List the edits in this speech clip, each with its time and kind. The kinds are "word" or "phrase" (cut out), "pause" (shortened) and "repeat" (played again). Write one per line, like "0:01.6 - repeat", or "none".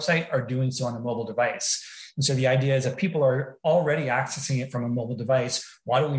none